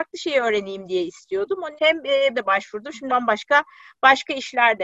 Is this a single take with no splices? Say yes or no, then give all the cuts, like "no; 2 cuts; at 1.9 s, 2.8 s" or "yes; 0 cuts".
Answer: no; 3 cuts; at 1.8 s, 2.3 s, 3.1 s